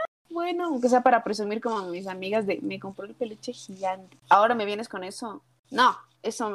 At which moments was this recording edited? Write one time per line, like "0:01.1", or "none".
0:04.2
0:05.6